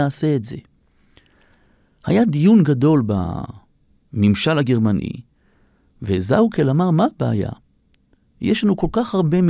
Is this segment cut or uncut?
uncut